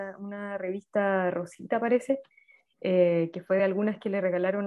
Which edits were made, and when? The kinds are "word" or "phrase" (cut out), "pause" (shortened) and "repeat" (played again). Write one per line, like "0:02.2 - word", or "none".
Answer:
none